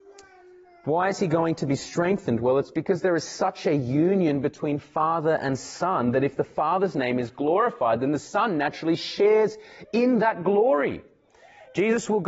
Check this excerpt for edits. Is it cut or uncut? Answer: uncut